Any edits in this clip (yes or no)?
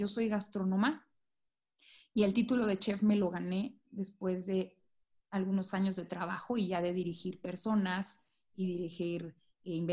no